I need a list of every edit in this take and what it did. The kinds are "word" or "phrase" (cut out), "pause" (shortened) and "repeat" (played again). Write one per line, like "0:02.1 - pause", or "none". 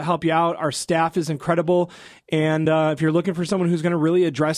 none